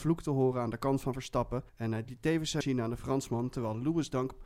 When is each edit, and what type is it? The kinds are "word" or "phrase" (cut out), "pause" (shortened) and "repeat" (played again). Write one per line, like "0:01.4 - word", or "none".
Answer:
0:01.7 - pause
0:02.6 - word